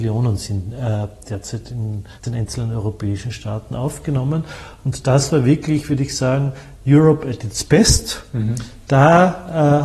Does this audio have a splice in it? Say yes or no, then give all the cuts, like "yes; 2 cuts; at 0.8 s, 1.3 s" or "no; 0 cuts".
yes; 1 cut; at 2.2 s